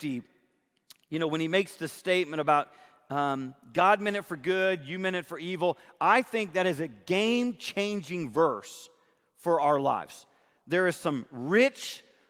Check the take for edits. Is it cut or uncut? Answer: uncut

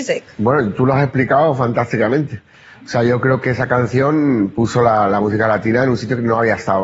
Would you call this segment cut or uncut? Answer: uncut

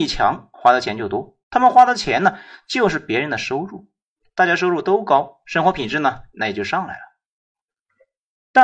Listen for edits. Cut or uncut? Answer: cut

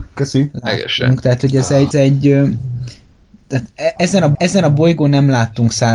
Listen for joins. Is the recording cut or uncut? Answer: cut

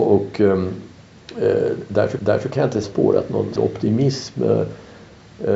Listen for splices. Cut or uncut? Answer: cut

